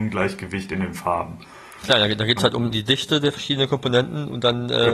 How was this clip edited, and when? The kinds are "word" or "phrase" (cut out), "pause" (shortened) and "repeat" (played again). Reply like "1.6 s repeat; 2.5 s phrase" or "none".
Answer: 2.7 s phrase